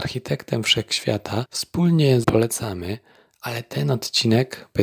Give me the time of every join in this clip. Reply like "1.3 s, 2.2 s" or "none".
2.2 s